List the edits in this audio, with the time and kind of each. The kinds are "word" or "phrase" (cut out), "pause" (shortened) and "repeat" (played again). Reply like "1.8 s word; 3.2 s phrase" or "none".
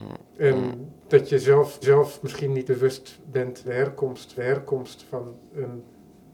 1.0 s word; 1.8 s repeat; 2.7 s word; 3.6 s word; 4.4 s repeat